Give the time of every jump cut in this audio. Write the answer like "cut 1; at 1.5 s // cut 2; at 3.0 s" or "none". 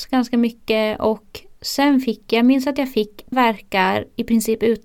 cut 1; at 3.3 s